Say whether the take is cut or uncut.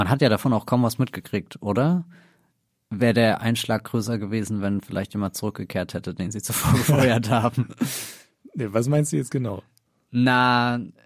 uncut